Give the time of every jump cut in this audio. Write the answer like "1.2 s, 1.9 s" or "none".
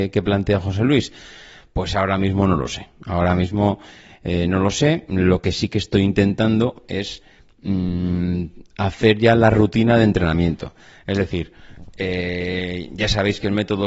none